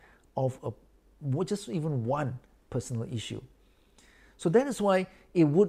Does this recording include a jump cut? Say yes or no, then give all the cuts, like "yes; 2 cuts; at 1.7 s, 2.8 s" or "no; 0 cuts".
no; 0 cuts